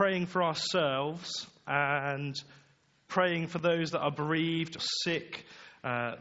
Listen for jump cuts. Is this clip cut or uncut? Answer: cut